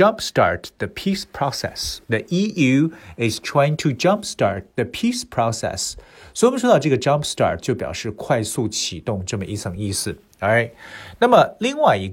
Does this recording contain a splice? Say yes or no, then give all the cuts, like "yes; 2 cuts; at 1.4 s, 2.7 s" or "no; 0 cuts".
yes; 1 cut; at 2.0 s